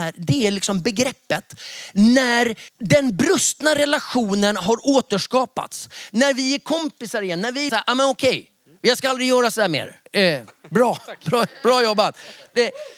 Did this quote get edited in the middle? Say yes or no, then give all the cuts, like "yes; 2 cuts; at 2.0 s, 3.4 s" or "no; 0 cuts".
yes; 3 cuts; at 2.7 s, 7.7 s, 10.1 s